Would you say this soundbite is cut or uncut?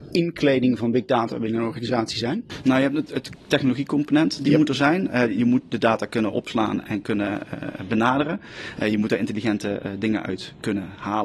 cut